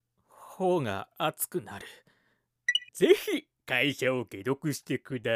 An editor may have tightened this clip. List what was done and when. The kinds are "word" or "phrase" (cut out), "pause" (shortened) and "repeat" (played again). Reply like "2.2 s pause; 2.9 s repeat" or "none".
1.1 s pause; 2.9 s pause